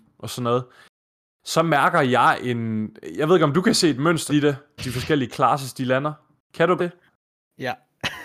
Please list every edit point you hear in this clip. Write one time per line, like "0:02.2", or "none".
0:04.3
0:04.8
0:06.8